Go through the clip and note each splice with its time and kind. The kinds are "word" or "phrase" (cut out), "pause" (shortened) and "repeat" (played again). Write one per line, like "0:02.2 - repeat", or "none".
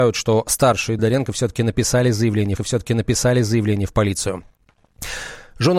0:01.0 - word
0:02.6 - repeat